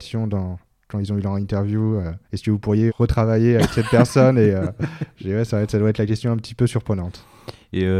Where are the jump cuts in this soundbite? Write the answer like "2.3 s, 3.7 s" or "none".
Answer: 2.2 s, 2.9 s